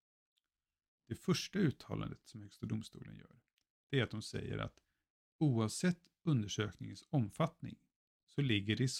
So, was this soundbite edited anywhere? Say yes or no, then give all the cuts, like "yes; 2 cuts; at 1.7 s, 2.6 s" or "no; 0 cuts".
no; 0 cuts